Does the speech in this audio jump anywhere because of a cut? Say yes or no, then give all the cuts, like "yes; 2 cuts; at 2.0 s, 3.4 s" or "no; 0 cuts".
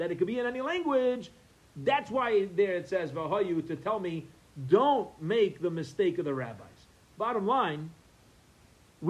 no; 0 cuts